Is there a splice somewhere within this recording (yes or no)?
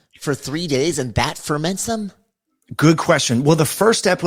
no